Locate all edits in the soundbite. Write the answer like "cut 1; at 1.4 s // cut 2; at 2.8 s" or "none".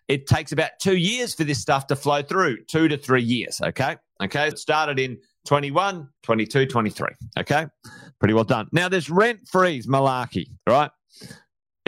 cut 1; at 4.5 s // cut 2; at 6.2 s // cut 3; at 10.6 s